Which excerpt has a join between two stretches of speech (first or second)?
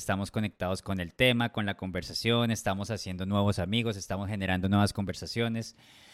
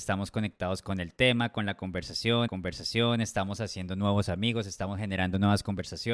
second